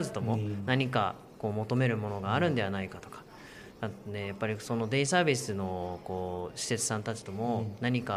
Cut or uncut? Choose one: uncut